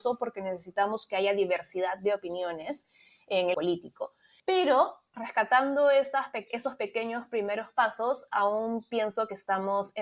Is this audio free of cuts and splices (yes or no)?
no